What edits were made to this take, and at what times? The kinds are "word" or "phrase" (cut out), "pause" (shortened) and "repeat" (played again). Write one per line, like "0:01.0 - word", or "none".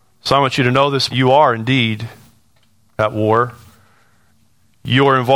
0:01.1 - phrase